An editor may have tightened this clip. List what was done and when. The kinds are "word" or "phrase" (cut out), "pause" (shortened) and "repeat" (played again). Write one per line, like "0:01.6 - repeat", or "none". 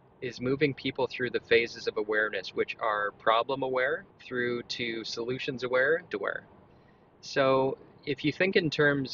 0:04.1 - pause
0:06.0 - phrase